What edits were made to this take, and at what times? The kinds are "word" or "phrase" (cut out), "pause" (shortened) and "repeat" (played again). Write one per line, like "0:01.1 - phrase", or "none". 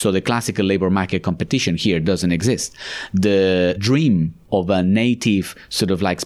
0:03.8 - word